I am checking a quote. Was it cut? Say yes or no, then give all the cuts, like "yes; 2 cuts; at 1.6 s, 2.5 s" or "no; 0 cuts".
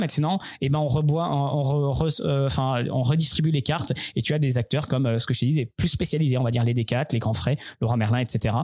no; 0 cuts